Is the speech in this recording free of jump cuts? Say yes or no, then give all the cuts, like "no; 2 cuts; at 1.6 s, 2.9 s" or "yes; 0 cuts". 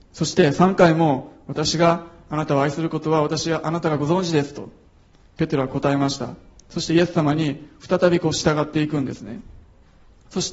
yes; 0 cuts